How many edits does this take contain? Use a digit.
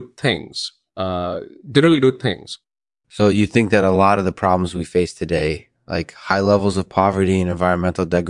0